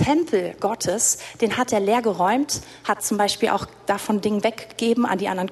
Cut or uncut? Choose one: uncut